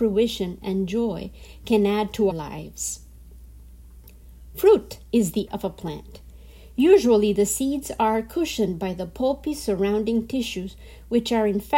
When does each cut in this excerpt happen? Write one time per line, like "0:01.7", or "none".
0:02.3
0:05.5